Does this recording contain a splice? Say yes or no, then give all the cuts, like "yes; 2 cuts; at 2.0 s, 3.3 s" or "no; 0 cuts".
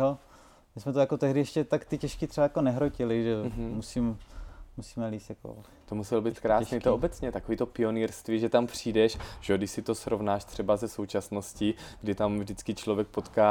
no; 0 cuts